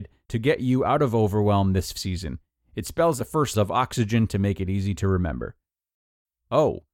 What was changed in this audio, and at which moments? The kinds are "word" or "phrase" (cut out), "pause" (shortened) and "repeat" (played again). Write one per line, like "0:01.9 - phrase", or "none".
0:01.9 - word
0:03.2 - word
0:03.5 - word